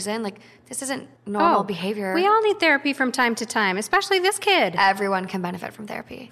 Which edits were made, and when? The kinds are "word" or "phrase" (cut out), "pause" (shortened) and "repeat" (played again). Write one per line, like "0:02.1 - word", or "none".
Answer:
0:01.2 - pause